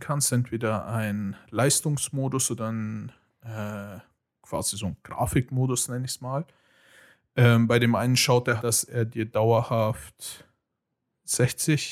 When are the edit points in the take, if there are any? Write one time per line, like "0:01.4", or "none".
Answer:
0:08.6